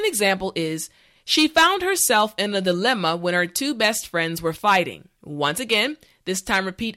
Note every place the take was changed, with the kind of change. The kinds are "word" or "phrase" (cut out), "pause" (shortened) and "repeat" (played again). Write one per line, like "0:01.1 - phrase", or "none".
0:05.2 - pause